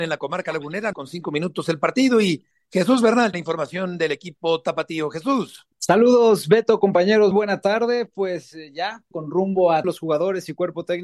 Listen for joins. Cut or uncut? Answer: cut